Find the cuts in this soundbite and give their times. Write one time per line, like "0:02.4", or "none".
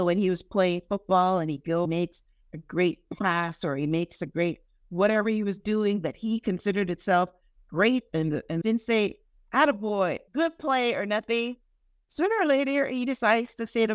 0:01.8
0:08.6
0:10.3